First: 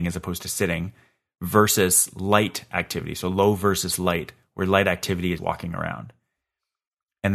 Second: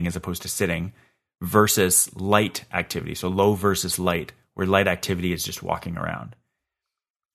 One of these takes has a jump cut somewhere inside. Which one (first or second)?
first